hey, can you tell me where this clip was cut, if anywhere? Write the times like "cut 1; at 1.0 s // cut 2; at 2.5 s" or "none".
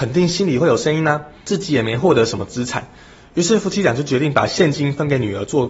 none